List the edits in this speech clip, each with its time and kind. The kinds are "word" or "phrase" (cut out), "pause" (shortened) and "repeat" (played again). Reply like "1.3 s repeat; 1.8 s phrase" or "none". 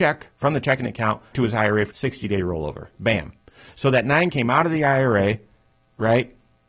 1.3 s word; 1.9 s phrase; 2.9 s pause; 4.3 s word

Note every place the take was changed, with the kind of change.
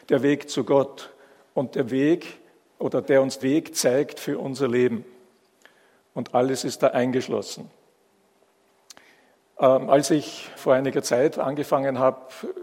3.0 s word; 3.4 s word; 10.6 s word

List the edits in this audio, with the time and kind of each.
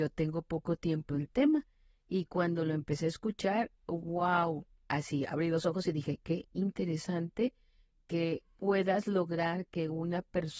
1.1 s word

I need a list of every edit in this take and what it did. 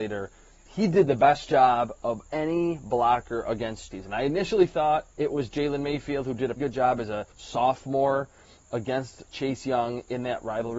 2.2 s pause; 3.9 s phrase; 5.1 s pause; 6.6 s word; 7.3 s pause; 9.3 s word

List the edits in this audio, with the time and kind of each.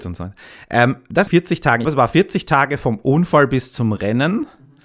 1.3 s phrase; 1.8 s phrase

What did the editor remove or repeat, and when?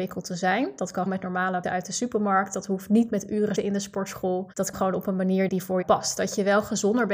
1.1 s word; 1.6 s word; 3.6 s word; 4.7 s word; 5.5 s word; 5.8 s word

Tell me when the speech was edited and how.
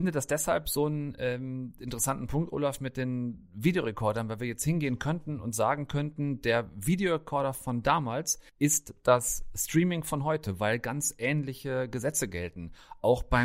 8.5 s pause

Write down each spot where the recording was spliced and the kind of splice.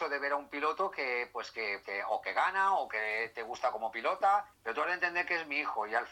1.8 s word; 4.5 s pause

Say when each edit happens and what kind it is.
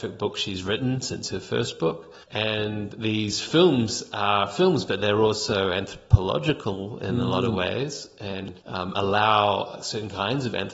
2.2 s pause; 8.6 s pause

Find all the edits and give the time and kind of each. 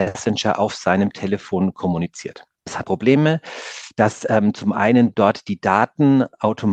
2.8 s word

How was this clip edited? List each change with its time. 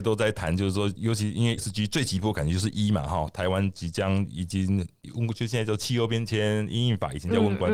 1.6 s word

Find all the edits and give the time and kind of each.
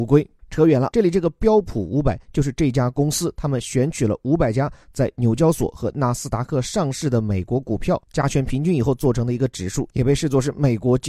0.9 s phrase

